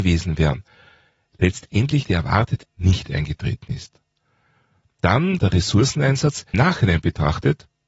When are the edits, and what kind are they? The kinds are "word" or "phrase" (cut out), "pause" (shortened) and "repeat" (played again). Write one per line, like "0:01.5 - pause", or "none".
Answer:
0:02.0 - word
0:02.6 - word
0:05.4 - word
0:06.5 - word